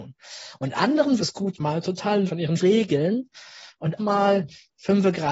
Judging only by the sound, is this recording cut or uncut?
cut